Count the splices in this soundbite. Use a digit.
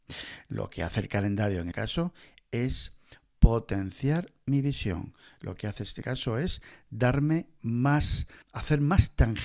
3